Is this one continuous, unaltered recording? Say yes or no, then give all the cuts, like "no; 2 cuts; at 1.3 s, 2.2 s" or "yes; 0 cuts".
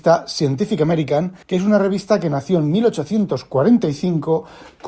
no; 1 cut; at 1.4 s